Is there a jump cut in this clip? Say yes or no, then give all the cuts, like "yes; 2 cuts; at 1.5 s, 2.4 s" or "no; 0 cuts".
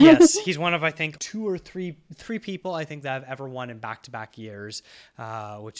yes; 1 cut; at 1.2 s